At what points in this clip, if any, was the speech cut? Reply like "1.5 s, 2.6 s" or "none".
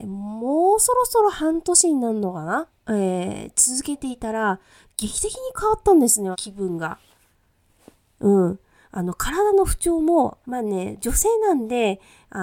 2.8 s, 6.3 s, 10.4 s